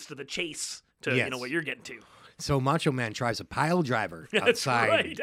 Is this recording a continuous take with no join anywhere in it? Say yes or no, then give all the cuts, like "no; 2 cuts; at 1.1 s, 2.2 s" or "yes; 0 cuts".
no; 1 cut; at 0.9 s